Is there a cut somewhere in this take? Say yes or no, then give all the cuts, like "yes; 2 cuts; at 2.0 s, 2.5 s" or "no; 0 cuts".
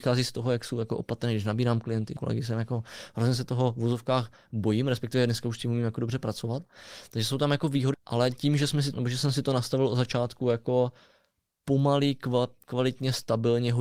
yes; 3 cuts; at 2.2 s, 7.9 s, 8.9 s